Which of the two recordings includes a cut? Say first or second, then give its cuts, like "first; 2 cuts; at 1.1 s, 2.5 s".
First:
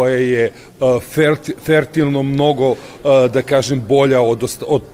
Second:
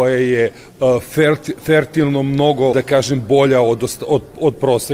second; 1 cut; at 2.7 s